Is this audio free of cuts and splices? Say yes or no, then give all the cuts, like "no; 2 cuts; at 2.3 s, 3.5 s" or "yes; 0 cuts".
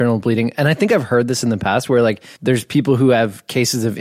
no; 1 cut; at 2.4 s